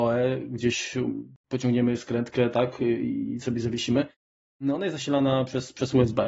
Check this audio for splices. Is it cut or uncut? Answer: uncut